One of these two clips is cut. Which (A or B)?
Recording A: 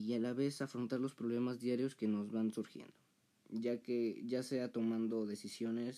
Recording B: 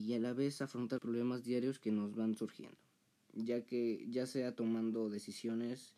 B